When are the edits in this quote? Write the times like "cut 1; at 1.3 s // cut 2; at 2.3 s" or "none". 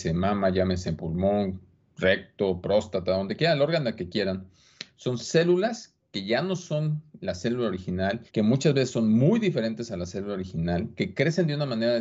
cut 1; at 8.3 s